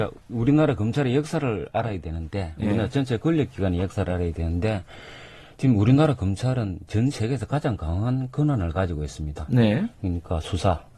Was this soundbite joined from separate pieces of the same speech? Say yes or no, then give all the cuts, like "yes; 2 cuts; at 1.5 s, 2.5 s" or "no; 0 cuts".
no; 0 cuts